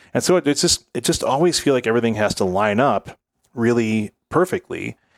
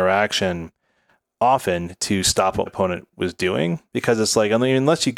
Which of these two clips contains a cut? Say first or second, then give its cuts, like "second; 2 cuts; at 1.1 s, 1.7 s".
second; 2 cuts; at 2.7 s, 3.9 s